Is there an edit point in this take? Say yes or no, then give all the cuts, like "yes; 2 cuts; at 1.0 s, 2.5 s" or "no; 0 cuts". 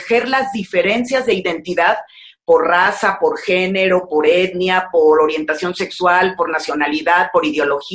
no; 0 cuts